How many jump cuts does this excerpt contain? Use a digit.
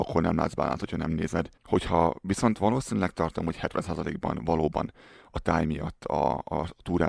1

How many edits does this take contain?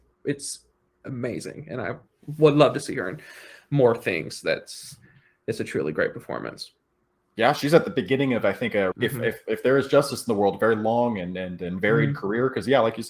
1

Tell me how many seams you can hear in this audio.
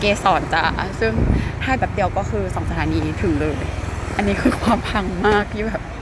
1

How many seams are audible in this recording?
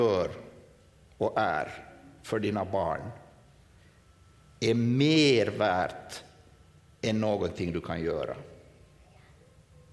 0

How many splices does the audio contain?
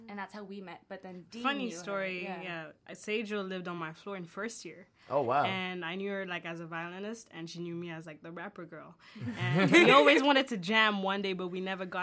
0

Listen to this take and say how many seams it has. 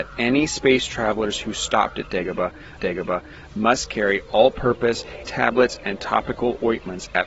2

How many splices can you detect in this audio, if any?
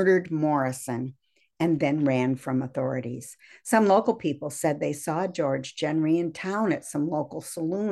0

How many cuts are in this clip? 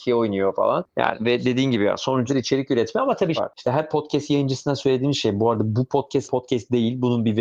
3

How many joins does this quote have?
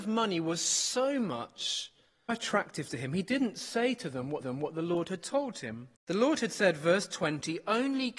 3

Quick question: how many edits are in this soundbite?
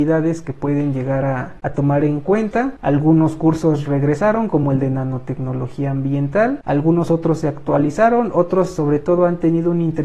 0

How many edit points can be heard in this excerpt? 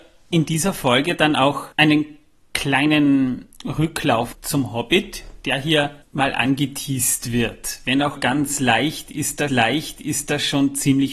5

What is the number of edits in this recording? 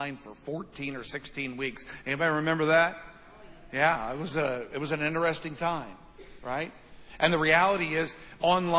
0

